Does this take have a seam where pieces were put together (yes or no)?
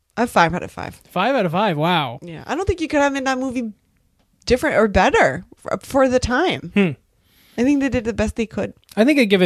no